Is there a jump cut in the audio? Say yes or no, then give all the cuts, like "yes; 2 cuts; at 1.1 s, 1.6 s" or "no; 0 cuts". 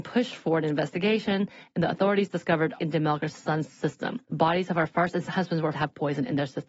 yes; 4 cuts; at 2.8 s, 4.2 s, 5.3 s, 5.7 s